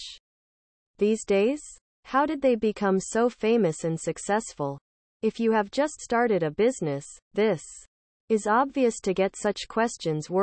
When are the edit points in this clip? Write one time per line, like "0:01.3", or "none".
none